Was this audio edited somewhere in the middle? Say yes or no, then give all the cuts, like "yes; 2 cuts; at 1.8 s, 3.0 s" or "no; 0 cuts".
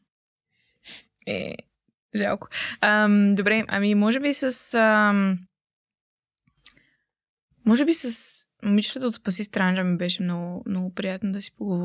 no; 0 cuts